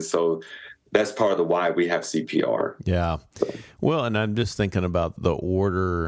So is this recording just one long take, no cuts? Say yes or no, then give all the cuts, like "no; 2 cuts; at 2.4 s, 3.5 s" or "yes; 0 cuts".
no; 1 cut; at 5.2 s